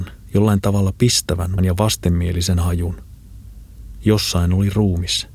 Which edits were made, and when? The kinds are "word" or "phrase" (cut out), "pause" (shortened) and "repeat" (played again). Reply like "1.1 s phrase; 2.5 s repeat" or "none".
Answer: 1.6 s word